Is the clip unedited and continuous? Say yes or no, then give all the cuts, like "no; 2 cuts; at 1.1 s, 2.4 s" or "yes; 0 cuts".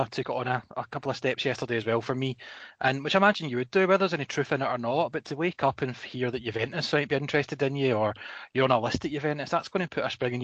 yes; 0 cuts